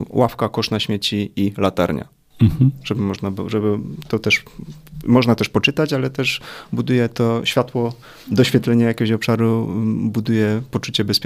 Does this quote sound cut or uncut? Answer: uncut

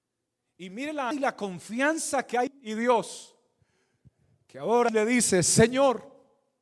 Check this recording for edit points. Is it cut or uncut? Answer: cut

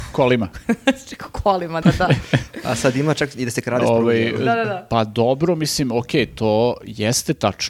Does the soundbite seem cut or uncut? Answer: cut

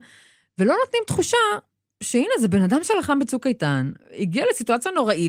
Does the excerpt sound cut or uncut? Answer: uncut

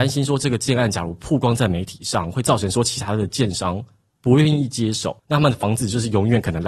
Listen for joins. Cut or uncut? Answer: cut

